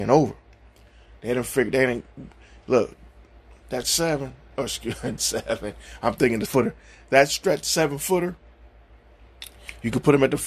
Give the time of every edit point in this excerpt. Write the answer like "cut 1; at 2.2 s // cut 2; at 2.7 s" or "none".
cut 1; at 3.8 s // cut 2; at 4.5 s // cut 3; at 5.2 s // cut 4; at 6.5 s